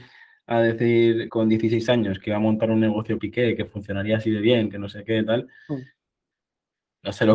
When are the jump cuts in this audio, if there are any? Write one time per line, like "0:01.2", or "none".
0:01.3
0:03.2